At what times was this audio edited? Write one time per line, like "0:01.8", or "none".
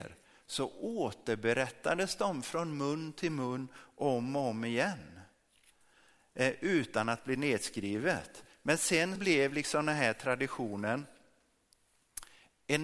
0:09.1